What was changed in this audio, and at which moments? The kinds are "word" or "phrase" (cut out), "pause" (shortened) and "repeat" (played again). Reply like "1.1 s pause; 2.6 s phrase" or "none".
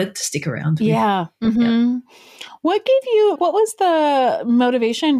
3.4 s word